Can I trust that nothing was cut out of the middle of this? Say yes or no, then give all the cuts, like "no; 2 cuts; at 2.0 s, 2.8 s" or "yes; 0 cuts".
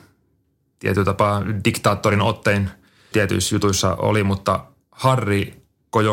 no; 1 cut; at 3.1 s